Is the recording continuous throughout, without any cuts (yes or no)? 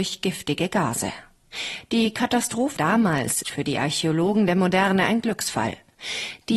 no